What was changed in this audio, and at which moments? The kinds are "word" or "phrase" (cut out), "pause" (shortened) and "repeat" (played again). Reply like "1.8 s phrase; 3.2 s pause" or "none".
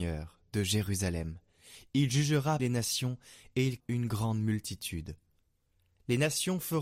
2.6 s word; 3.8 s word